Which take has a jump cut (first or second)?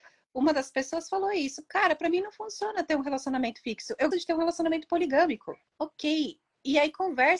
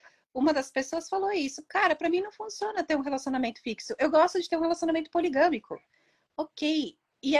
first